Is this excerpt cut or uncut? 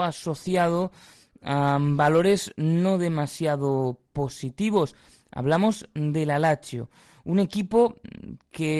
uncut